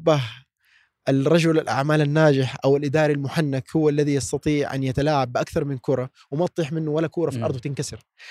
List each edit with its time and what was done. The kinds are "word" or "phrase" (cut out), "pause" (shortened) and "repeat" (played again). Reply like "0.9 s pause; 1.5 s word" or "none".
none